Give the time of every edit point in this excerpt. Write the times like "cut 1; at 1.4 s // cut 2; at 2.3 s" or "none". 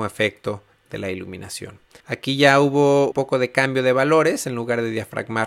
cut 1; at 2.0 s // cut 2; at 3.1 s